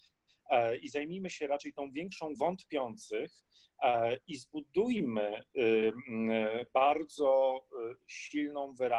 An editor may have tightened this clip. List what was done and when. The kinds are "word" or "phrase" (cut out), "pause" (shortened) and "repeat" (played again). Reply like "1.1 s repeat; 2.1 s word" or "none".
2.4 s word; 6.7 s phrase